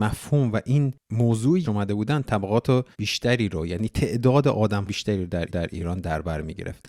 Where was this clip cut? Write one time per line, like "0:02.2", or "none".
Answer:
0:01.6
0:02.9
0:04.9
0:05.5